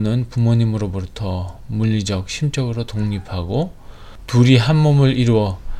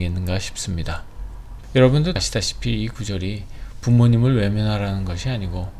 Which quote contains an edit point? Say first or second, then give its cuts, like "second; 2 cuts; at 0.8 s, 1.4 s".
second; 1 cut; at 2.2 s